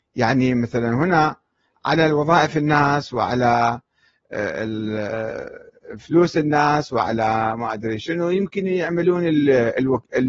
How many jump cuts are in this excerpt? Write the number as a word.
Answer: zero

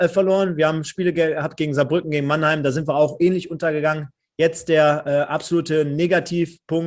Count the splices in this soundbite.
zero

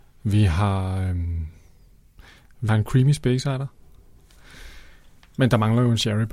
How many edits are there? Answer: one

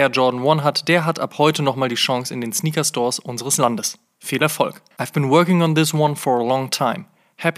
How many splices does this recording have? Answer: one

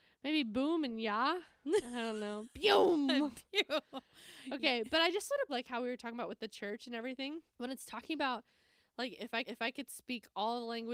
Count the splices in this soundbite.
three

